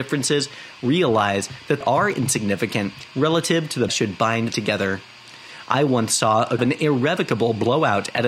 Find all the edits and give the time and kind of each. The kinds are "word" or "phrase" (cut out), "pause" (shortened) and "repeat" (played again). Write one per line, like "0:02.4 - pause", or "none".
0:01.8 - word
0:03.9 - phrase
0:04.5 - word
0:06.6 - phrase